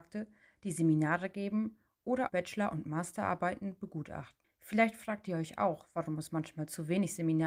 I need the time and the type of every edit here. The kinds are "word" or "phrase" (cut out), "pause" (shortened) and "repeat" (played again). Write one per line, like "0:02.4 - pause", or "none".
0:02.3 - word